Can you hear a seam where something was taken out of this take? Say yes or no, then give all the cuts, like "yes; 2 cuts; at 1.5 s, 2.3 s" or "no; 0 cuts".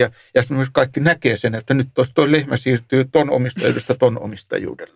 no; 0 cuts